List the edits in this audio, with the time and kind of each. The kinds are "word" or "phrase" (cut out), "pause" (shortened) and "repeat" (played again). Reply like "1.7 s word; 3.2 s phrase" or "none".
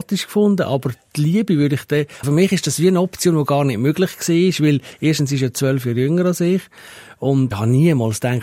2.2 s word; 7.5 s word